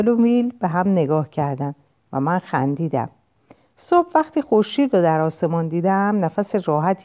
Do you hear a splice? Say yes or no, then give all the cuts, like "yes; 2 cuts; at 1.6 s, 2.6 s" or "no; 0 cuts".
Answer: no; 0 cuts